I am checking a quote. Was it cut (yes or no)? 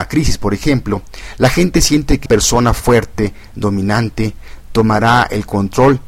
yes